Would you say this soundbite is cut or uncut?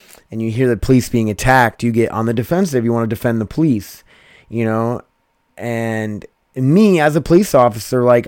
uncut